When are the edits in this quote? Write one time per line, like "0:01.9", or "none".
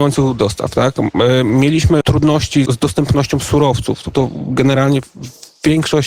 0:02.0
0:02.7
0:04.1